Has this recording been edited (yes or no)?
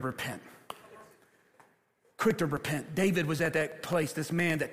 no